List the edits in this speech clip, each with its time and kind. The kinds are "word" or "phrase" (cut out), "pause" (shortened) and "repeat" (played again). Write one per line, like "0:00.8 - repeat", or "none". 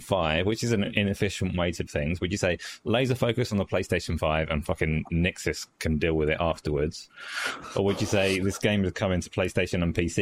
0:01.9 - word